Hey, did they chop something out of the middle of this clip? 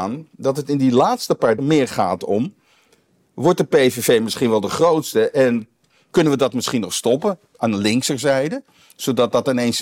yes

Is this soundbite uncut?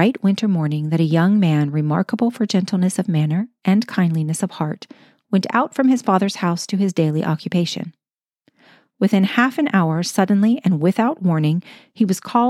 yes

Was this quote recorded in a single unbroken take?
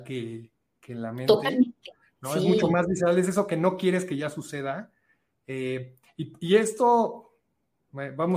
yes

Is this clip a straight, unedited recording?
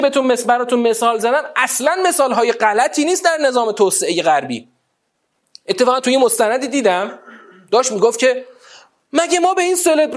yes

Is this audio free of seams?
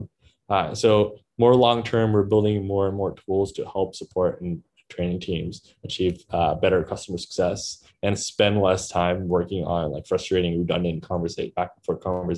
yes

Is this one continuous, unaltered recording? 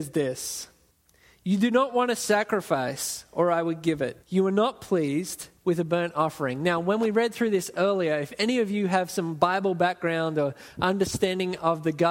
no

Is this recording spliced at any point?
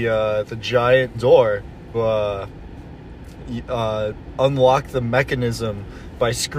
yes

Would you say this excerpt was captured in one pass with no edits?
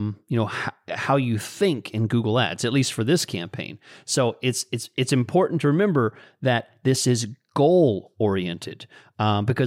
yes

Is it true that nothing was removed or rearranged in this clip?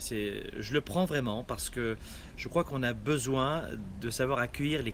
yes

